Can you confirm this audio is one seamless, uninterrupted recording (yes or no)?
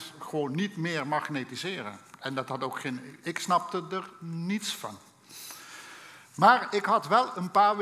yes